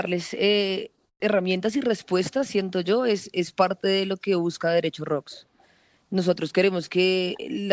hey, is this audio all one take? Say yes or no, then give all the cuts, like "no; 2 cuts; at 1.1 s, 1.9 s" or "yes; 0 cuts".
yes; 0 cuts